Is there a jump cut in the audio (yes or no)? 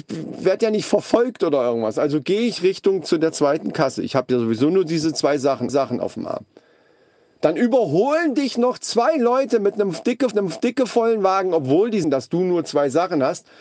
yes